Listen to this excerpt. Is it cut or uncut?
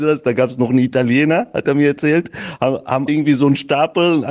cut